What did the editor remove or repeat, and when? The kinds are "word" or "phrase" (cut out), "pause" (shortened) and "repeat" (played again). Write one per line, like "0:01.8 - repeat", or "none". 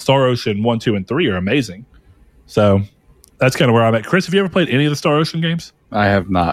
none